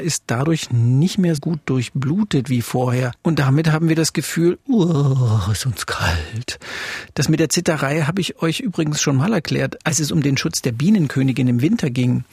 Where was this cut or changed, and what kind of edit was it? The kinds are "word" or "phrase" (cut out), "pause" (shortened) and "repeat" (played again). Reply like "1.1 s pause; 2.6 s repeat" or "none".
1.4 s word